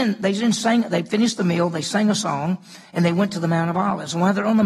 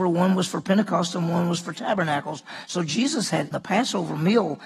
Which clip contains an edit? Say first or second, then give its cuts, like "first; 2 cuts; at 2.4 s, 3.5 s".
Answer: second; 1 cut; at 3.5 s